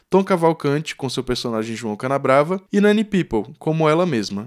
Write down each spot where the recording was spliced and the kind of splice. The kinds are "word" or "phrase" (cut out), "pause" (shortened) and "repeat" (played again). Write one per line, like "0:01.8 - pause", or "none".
0:02.7 - pause